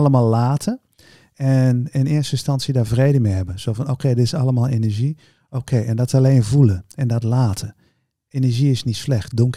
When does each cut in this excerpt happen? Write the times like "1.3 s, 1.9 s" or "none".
none